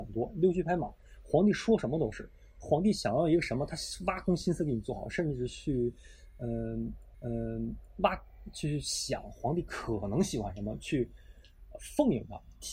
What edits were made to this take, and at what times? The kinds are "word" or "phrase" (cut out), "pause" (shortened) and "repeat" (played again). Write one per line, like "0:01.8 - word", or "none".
0:07.1 - repeat